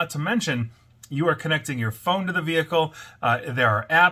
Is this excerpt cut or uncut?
uncut